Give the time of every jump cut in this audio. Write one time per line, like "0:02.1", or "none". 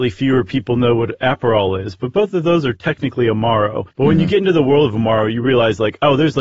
0:03.9

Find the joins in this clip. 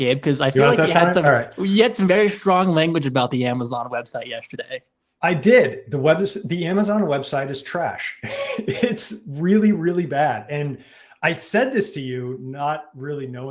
none

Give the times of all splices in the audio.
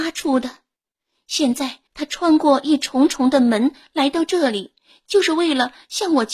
0:01.9

